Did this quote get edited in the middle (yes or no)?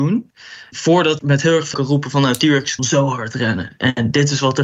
yes